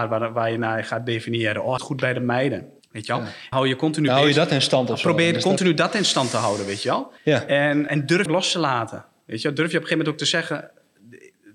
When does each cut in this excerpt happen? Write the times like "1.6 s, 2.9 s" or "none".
1.8 s, 2.8 s, 3.5 s, 7.2 s, 7.9 s, 8.3 s